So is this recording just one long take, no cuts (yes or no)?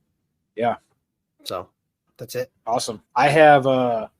no